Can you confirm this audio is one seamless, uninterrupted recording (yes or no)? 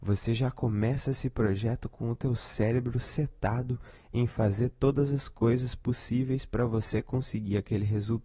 yes